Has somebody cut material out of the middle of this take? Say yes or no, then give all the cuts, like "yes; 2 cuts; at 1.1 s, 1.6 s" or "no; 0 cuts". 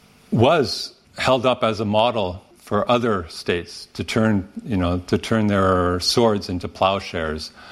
yes; 2 cuts; at 1.0 s, 2.5 s